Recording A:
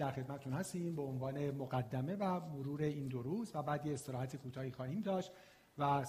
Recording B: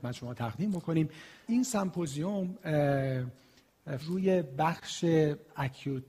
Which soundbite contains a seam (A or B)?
B